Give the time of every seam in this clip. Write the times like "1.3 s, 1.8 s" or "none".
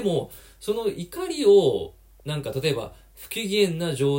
none